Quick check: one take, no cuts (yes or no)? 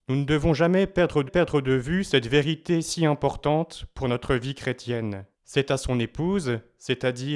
no